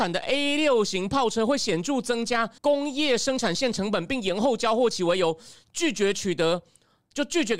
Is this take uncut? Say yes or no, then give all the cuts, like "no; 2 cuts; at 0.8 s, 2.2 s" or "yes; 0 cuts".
no; 1 cut; at 2.6 s